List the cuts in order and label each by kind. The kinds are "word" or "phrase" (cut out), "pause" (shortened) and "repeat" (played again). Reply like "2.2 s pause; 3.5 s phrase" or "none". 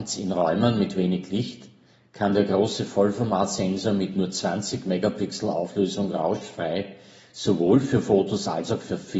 none